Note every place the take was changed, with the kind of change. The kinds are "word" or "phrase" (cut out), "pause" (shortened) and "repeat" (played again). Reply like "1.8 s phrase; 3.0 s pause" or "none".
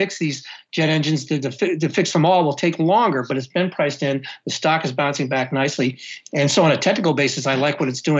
none